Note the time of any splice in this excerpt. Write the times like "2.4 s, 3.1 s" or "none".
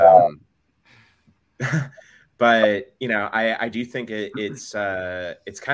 none